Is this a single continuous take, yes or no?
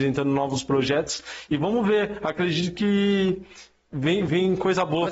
yes